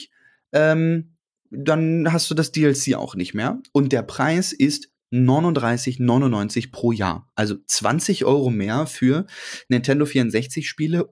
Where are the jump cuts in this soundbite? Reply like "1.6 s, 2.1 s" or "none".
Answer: none